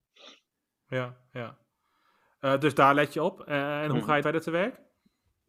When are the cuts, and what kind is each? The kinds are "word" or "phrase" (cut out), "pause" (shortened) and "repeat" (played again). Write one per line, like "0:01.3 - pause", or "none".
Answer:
0:04.2 - word